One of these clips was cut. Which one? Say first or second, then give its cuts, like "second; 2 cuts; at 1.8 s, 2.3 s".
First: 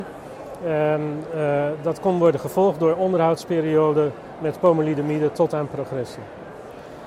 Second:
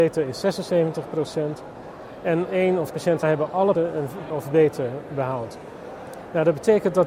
second; 5 cuts; at 2.5 s, 2.9 s, 3.2 s, 3.7 s, 4.3 s